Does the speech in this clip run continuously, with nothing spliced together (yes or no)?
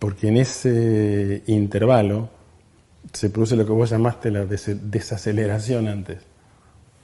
yes